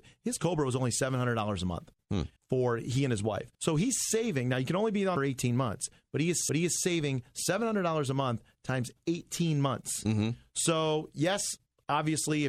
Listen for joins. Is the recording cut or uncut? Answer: cut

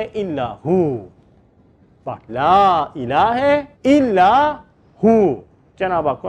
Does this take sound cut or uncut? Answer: cut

